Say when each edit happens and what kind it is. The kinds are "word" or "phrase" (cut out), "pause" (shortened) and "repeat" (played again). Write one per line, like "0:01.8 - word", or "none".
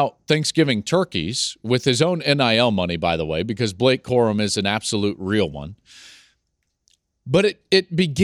none